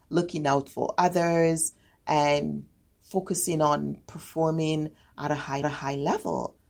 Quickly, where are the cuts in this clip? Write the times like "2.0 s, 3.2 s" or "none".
5.6 s